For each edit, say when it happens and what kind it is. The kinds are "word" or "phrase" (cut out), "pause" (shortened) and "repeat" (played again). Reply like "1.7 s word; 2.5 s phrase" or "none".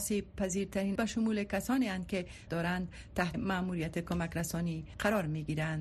1.0 s word; 2.5 s word; 3.3 s word